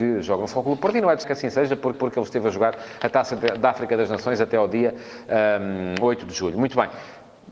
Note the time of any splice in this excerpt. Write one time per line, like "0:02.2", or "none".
0:01.2
0:01.9